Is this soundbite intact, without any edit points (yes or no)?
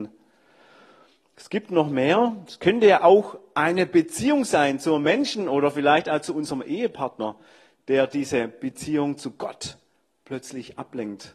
yes